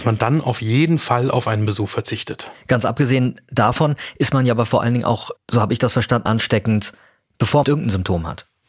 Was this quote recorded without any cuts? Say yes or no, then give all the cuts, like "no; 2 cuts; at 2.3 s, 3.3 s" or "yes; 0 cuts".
no; 3 cuts; at 5.4 s, 6.3 s, 7.6 s